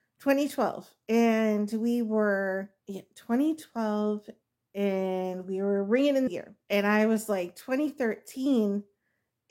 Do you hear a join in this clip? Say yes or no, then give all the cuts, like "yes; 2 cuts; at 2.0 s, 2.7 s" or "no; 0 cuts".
yes; 4 cuts; at 2.8 s, 4.4 s, 6.3 s, 6.6 s